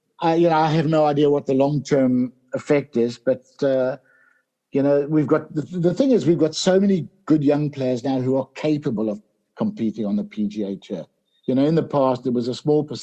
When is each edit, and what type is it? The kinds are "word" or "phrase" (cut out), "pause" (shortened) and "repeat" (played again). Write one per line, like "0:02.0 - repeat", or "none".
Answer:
none